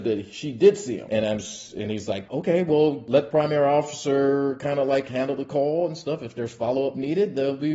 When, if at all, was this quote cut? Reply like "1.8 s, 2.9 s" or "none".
none